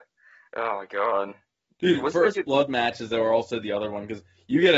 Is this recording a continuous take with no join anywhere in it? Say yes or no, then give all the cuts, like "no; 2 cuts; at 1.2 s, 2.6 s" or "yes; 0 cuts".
yes; 0 cuts